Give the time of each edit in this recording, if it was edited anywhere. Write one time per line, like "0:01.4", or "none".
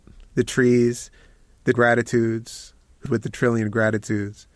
0:01.7
0:03.1